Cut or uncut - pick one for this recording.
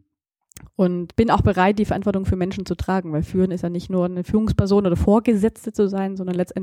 uncut